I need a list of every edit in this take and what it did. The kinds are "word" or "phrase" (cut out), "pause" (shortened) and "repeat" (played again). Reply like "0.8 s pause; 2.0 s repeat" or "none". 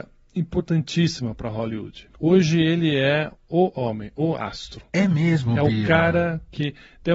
2.1 s pause; 3.4 s word